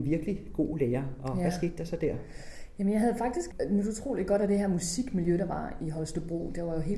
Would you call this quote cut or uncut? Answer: uncut